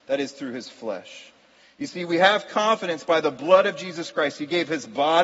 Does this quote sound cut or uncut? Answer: uncut